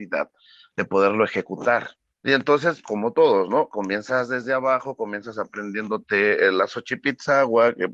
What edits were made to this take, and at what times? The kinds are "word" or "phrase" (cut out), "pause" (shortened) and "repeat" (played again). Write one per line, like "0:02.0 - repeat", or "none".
0:02.2 - pause
0:02.8 - word